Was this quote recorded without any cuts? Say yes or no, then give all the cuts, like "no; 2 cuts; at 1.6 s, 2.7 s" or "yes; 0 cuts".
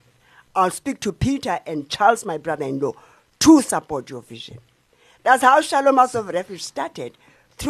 yes; 0 cuts